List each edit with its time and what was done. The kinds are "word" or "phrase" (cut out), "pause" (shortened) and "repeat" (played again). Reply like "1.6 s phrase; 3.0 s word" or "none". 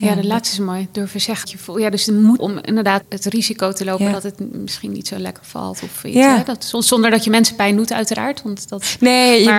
1.4 s word; 2.4 s word; 3.0 s word